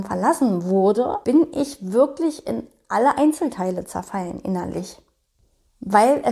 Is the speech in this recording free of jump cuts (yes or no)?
yes